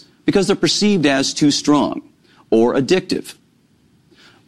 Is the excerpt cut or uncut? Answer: uncut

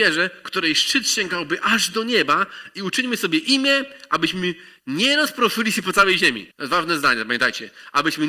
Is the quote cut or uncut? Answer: cut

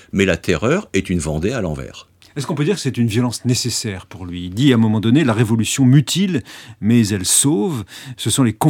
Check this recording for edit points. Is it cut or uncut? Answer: uncut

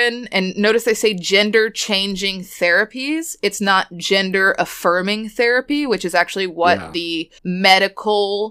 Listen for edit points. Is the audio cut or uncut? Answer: cut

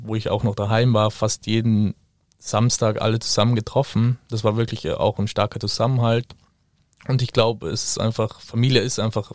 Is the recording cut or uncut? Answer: uncut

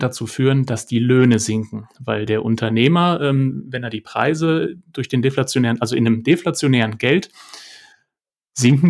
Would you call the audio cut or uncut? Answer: uncut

